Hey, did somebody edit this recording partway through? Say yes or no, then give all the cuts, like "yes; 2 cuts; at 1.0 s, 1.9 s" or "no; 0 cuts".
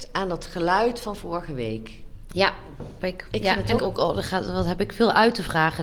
yes; 2 cuts; at 3.0 s, 3.8 s